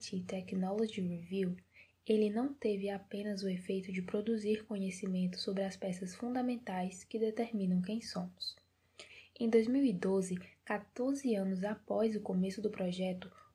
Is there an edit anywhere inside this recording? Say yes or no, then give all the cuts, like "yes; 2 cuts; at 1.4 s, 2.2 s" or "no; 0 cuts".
no; 0 cuts